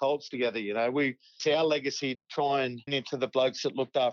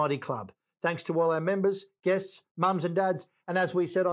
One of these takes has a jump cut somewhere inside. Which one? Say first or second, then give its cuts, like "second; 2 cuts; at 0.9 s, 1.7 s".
first; 3 cuts; at 1.4 s, 2.1 s, 2.9 s